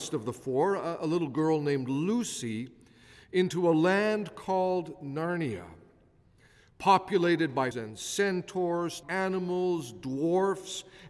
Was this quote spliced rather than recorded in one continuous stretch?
yes; 2 cuts; at 7.7 s, 9.0 s

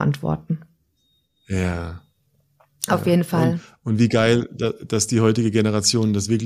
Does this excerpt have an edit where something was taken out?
no; 0 cuts

